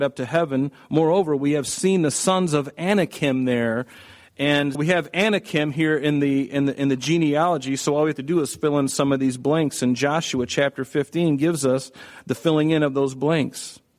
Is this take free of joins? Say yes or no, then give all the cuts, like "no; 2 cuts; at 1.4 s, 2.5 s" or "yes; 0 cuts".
no; 1 cut; at 4.7 s